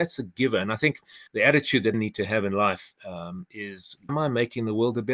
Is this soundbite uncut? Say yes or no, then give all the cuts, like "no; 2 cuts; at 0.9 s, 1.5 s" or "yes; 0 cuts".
no; 3 cuts; at 1.3 s, 1.9 s, 4.1 s